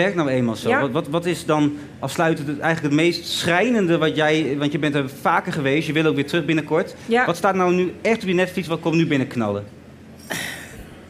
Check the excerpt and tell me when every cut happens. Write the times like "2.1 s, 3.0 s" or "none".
none